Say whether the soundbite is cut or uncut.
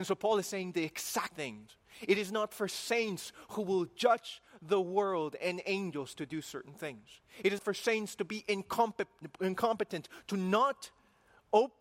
cut